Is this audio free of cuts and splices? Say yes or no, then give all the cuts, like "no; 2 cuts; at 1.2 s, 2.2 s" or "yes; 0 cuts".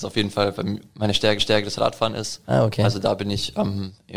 no; 1 cut; at 1.4 s